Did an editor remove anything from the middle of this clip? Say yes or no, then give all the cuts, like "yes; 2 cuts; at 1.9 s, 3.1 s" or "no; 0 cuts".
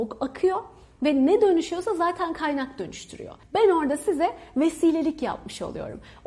yes; 1 cut; at 3.4 s